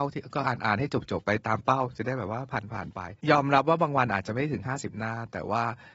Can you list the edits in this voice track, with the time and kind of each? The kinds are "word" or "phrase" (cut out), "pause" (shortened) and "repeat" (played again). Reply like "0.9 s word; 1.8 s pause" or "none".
3.2 s pause

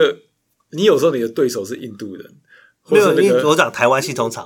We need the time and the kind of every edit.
none

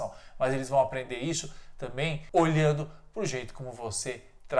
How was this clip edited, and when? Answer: none

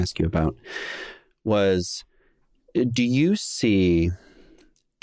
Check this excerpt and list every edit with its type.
none

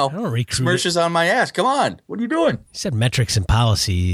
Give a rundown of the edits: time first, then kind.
2.7 s pause

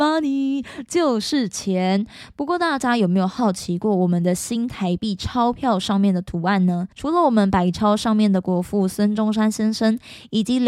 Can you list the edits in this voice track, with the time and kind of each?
6.9 s pause

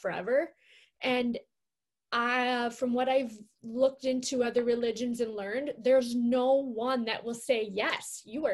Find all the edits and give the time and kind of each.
none

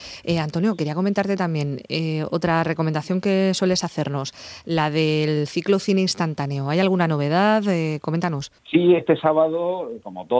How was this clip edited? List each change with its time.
8.6 s pause

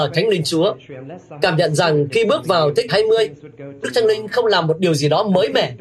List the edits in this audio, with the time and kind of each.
2.9 s word; 3.8 s word

